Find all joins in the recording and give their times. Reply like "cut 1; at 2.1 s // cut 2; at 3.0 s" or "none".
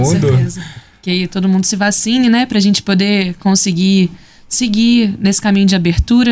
none